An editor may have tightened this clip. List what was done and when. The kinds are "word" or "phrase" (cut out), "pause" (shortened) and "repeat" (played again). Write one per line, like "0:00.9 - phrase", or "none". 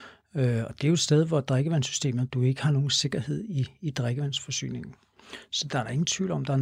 0:02.3 - phrase